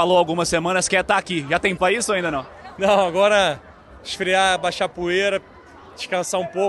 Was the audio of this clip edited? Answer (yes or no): yes